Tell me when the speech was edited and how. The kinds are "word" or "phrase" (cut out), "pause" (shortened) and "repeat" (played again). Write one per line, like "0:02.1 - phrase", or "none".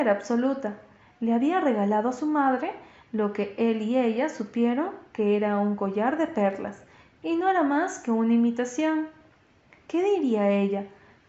none